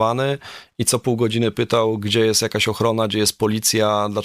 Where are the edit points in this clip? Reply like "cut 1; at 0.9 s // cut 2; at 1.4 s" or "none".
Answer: none